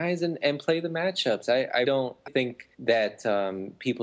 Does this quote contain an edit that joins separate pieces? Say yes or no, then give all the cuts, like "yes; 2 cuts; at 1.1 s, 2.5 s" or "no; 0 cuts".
yes; 3 cuts; at 1.8 s, 2.3 s, 2.7 s